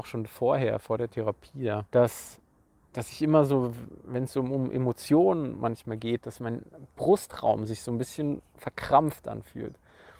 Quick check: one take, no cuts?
no; 1 cut; at 1.9 s

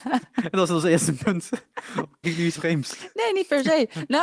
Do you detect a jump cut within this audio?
yes; 2 cuts; at 2.2 s, 2.6 s

